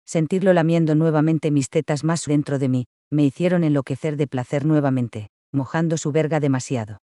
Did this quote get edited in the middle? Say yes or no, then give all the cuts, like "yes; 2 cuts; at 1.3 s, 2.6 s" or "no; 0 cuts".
yes; 1 cut; at 2.3 s